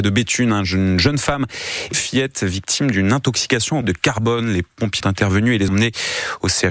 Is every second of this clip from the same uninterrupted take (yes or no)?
no